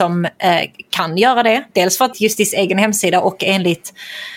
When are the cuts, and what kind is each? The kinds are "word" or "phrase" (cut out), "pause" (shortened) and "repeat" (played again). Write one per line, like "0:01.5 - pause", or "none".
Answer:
0:02.1 - phrase